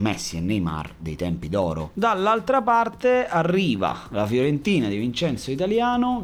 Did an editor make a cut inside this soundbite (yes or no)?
no